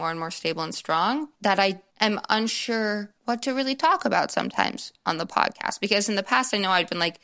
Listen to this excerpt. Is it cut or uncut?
cut